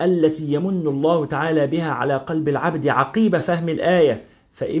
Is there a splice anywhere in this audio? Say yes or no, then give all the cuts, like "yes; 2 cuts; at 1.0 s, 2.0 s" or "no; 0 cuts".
no; 0 cuts